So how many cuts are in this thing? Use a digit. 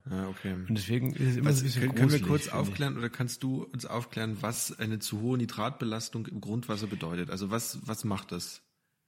0